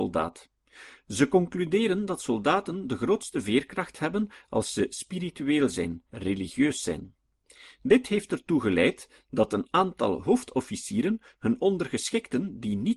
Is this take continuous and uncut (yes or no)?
no